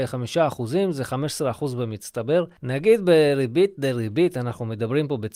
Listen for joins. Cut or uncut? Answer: uncut